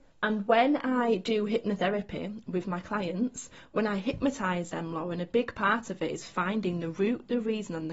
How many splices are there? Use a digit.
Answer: 0